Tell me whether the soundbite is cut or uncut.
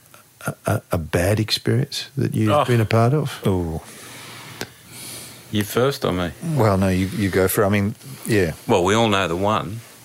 uncut